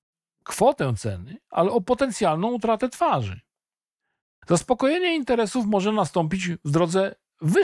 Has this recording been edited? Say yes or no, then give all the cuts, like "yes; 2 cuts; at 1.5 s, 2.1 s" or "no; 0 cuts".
no; 0 cuts